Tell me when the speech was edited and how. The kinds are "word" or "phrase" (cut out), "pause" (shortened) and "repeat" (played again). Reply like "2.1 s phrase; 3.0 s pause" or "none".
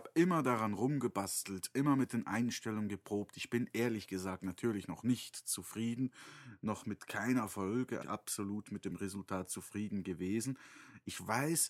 8.0 s word